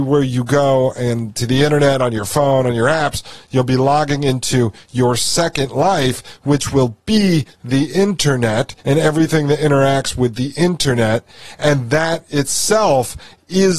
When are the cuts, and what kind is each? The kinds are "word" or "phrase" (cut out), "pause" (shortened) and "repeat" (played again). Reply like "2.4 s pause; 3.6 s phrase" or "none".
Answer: 8.8 s pause